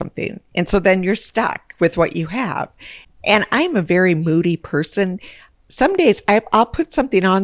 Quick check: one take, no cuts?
yes; 0 cuts

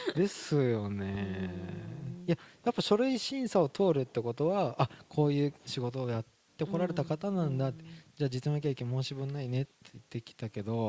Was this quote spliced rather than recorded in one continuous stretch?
no; 0 cuts

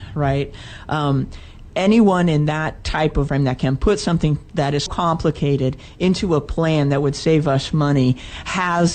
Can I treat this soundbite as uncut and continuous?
no; 2 cuts; at 3.3 s, 4.9 s

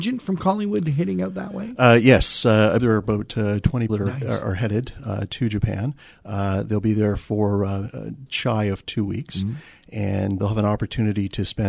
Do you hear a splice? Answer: yes; 4 cuts; at 2.8 s, 3.9 s, 8.3 s, 10.4 s

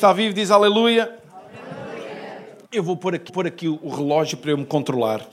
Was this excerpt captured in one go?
no; 2 cuts; at 2.6 s, 3.3 s

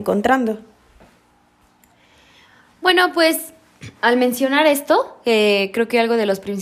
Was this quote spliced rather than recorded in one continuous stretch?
no; 0 cuts

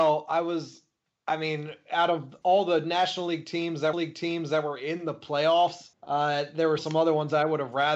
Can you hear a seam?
yes; 3 cuts; at 3.9 s, 5.9 s, 6.8 s

